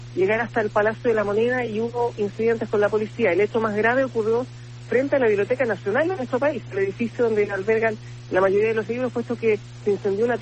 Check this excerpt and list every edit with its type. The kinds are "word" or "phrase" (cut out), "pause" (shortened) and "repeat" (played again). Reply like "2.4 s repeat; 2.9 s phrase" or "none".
none